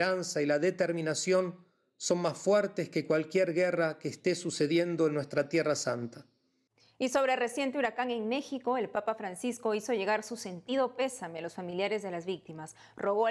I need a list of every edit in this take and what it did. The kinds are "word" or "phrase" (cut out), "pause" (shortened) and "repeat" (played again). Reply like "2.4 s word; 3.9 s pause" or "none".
none